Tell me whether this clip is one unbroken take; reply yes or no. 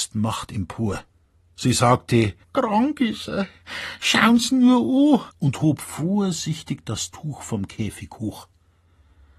no